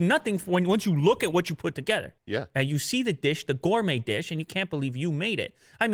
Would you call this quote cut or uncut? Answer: cut